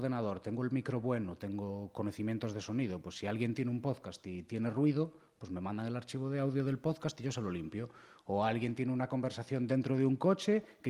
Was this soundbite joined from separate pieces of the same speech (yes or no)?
no